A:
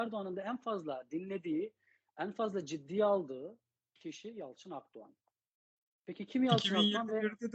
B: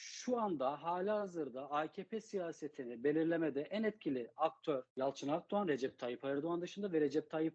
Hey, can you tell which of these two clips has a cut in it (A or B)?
B